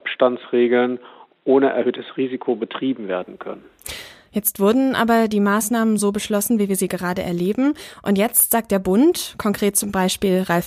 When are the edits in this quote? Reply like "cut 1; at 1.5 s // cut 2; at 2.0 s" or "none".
none